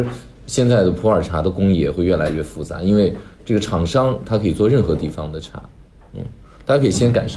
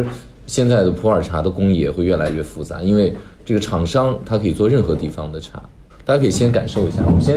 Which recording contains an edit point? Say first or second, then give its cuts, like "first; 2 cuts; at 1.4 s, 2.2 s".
second; 1 cut; at 5.9 s